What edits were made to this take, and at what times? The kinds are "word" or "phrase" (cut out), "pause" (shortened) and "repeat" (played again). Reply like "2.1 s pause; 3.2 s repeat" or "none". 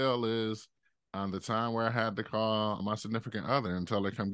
2.8 s word